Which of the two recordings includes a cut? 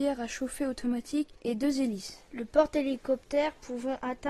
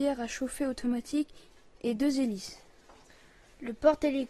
first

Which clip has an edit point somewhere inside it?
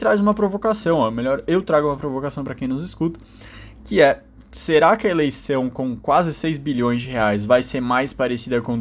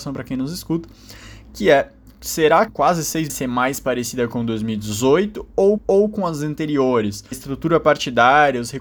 second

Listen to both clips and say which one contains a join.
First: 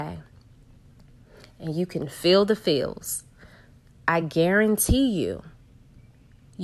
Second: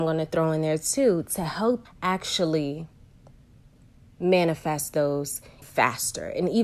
second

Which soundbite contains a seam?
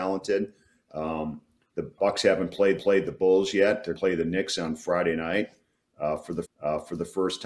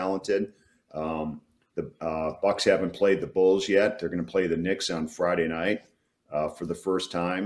first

